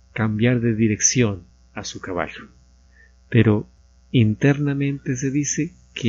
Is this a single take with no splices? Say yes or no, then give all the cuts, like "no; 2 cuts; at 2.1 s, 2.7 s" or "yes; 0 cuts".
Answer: yes; 0 cuts